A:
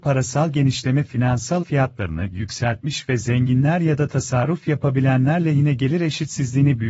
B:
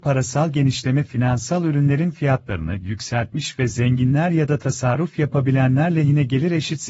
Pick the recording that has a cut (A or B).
A